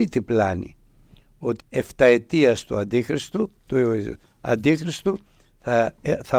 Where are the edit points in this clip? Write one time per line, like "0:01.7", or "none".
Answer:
0:01.6